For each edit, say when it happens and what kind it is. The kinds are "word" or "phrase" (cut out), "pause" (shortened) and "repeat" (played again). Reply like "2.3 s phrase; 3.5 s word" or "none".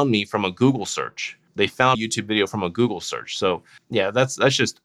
1.9 s word